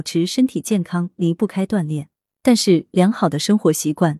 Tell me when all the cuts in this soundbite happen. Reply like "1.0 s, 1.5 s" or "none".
none